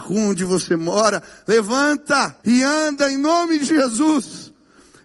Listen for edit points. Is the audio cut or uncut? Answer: cut